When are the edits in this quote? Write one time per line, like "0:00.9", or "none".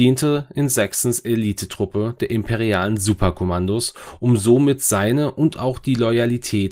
none